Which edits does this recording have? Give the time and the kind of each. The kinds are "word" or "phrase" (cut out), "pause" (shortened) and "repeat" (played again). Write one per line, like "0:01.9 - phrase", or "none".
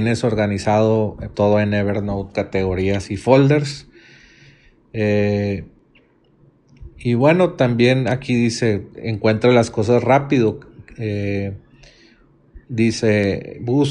0:01.3 - word
0:02.3 - word
0:06.9 - pause
0:12.6 - pause

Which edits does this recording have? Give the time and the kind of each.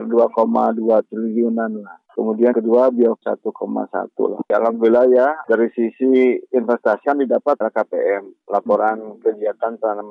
0:02.5 - word
0:03.2 - word
0:07.0 - word
0:07.6 - word

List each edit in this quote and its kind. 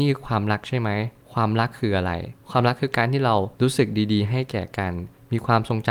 0:03.5 - pause

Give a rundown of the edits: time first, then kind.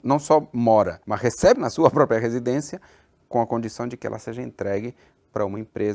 0:01.0 - pause
0:01.5 - phrase

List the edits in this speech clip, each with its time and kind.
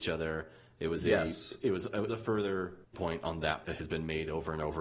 0:02.1 - phrase
0:02.9 - word
0:03.6 - word

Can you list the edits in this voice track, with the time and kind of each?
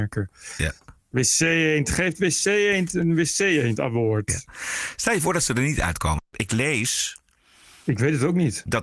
0:01.0 - pause

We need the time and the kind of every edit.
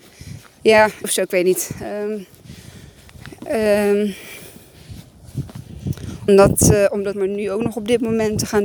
0:01.0 - word
0:06.3 - word
0:07.1 - word

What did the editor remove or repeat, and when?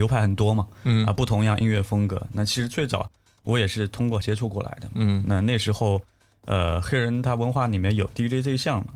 0:04.2 - word

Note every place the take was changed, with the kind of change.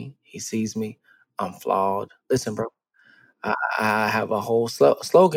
none

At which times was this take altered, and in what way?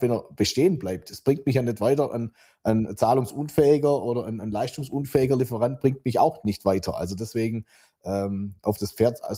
none

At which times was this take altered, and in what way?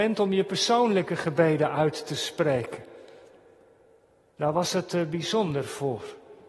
none

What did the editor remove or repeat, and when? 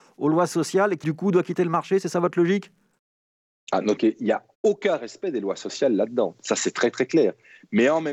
0:01.0 - word
0:04.0 - phrase

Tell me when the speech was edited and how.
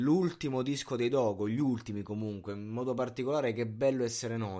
none

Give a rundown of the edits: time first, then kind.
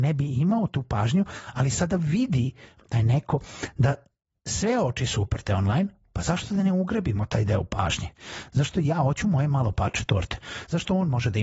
none

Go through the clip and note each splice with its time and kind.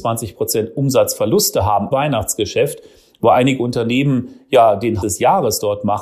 0:01.9 - word
0:05.0 - word

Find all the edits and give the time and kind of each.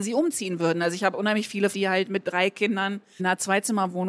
0:01.7 - word
0:03.2 - word

